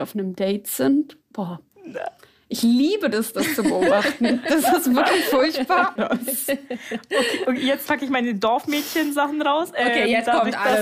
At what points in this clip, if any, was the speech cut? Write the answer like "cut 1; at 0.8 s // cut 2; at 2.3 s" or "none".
cut 1; at 6.0 s // cut 2; at 7.9 s